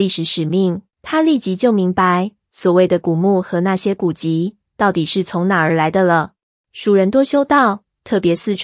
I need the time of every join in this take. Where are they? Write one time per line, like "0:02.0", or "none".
0:00.9
0:06.6

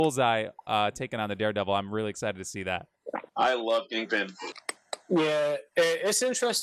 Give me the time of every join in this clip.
0:03.3

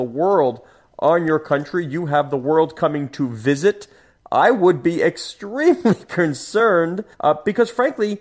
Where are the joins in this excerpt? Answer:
0:07.1

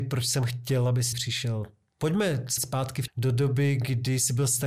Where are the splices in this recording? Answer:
0:01.1
0:02.6
0:03.1

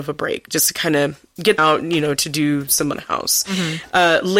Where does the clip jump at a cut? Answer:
0:01.6
0:02.9

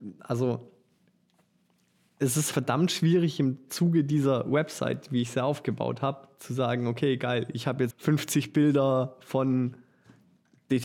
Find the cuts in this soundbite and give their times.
0:02.5
0:07.9

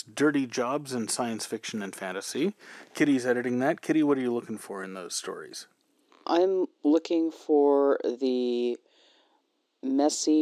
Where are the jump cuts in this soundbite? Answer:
none

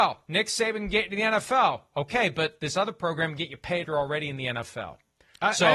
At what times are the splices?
0:03.8

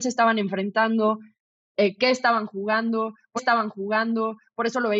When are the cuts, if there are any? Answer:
0:03.4

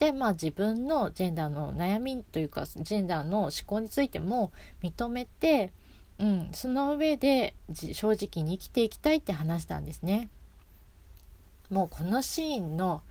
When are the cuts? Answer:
0:02.3

